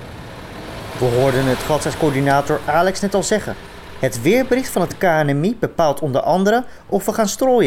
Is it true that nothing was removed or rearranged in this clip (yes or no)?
yes